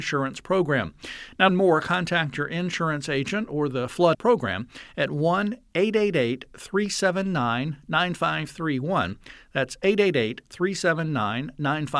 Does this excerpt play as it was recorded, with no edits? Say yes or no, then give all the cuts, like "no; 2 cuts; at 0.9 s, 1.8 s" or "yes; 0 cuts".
no; 2 cuts; at 1.5 s, 4.1 s